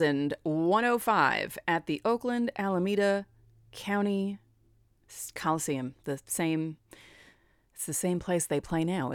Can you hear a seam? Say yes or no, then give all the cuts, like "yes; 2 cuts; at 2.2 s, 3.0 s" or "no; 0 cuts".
no; 0 cuts